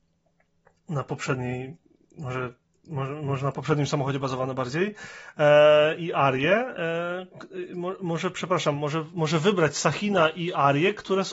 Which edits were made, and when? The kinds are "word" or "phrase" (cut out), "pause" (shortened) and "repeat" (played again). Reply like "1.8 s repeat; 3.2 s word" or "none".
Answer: none